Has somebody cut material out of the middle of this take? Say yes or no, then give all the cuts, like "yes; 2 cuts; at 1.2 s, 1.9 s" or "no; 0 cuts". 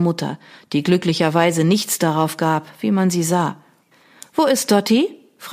no; 0 cuts